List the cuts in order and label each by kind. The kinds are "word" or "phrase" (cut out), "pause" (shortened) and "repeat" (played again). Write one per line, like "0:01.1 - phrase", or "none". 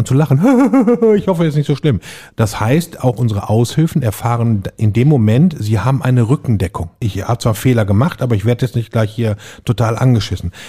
none